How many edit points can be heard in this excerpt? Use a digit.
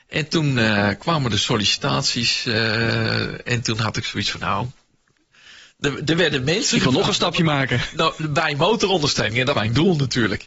1